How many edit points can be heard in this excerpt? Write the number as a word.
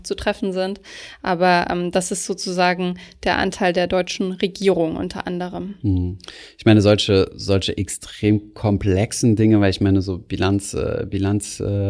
zero